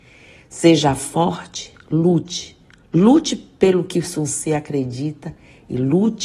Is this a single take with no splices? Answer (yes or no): yes